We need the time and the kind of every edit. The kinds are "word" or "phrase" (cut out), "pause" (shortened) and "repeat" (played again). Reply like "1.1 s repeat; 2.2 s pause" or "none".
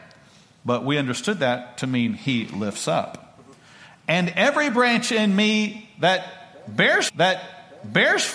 7.1 s repeat